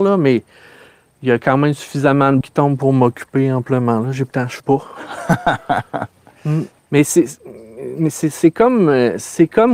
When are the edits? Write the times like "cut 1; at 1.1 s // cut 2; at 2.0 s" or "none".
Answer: cut 1; at 2.4 s // cut 2; at 4.3 s // cut 3; at 4.6 s